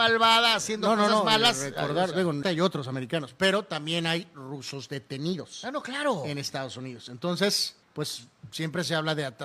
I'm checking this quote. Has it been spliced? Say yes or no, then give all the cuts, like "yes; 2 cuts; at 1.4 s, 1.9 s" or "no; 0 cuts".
yes; 2 cuts; at 2.4 s, 7.8 s